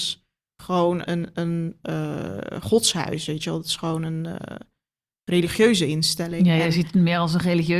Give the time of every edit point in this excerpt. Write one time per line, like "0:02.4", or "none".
0:01.1